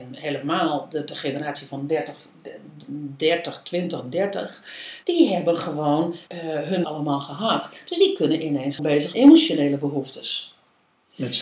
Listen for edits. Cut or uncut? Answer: cut